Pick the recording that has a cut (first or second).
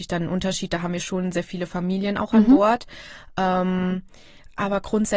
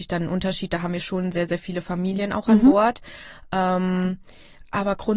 first